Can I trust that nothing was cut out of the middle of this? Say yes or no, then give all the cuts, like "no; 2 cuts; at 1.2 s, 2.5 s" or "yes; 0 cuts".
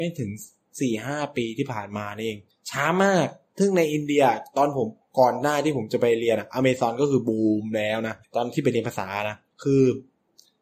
no; 3 cuts; at 2.5 s, 8.2 s, 9.5 s